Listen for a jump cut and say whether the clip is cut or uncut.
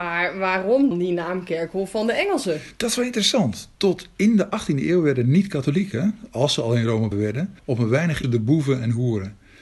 cut